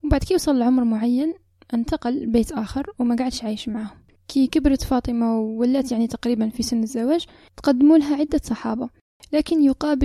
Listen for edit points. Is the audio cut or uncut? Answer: uncut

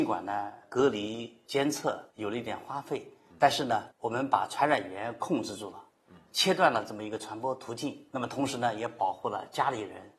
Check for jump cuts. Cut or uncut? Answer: cut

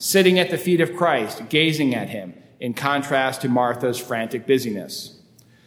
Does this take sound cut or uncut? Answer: uncut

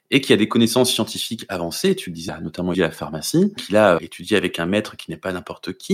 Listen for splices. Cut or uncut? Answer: cut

